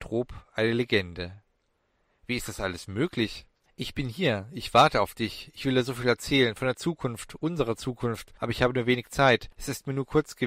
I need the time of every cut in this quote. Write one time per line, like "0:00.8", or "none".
none